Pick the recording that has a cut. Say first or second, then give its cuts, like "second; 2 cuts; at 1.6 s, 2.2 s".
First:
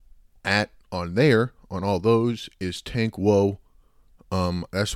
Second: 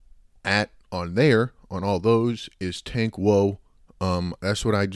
second; 1 cut; at 3.7 s